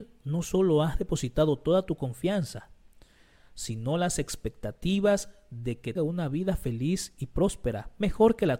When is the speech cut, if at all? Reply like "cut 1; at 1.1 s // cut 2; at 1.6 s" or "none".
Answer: cut 1; at 6.0 s